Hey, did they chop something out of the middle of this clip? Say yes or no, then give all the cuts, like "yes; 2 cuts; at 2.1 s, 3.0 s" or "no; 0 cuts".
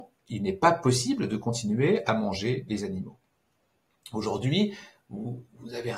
no; 0 cuts